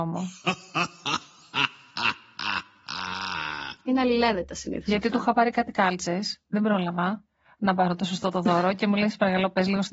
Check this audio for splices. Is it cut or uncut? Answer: uncut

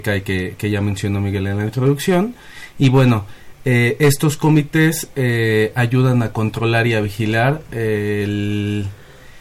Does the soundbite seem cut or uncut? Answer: uncut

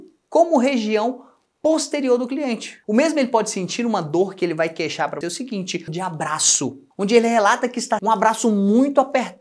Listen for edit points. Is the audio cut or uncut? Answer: cut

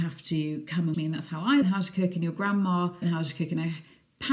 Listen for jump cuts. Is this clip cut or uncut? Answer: cut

